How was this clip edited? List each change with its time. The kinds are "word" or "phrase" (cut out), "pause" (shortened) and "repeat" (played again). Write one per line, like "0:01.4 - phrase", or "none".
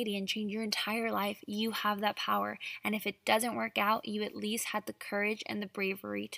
none